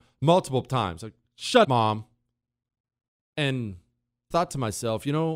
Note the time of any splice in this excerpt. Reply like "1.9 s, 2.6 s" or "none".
1.6 s, 4.3 s